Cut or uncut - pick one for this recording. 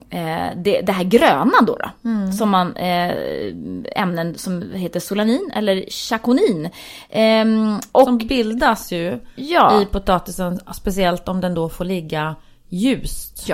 uncut